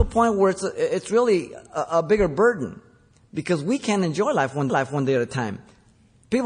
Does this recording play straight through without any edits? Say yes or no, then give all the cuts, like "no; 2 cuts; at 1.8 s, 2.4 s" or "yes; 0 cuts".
no; 1 cut; at 4.7 s